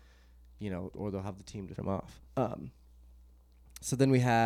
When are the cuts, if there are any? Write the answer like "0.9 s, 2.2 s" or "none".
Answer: 0.9 s, 1.8 s, 2.3 s